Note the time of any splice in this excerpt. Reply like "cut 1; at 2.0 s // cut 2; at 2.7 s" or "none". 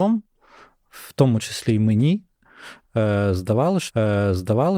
cut 1; at 3.9 s